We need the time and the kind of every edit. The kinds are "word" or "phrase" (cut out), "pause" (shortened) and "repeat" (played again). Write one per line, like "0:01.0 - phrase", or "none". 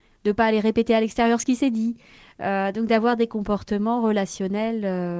none